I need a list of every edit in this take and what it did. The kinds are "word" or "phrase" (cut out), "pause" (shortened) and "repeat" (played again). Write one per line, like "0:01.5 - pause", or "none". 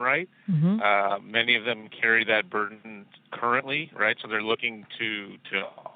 none

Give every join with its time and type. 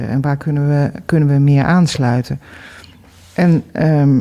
none

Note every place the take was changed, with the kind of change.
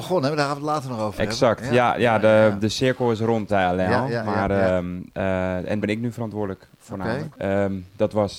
0:03.5 - word
0:05.8 - word

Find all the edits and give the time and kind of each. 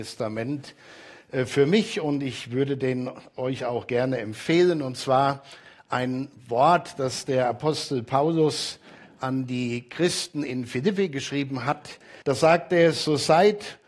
0:12.2 - pause

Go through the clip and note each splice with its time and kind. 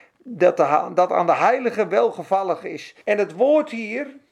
0:01.1 - word
0:03.0 - pause

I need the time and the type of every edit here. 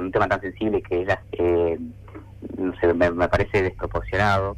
0:01.2 - word

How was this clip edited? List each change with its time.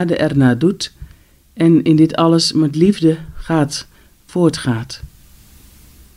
none

